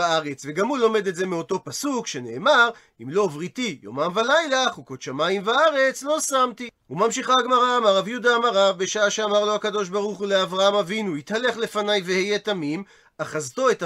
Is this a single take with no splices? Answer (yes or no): yes